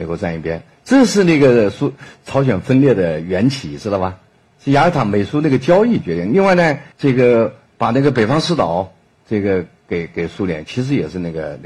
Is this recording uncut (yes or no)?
no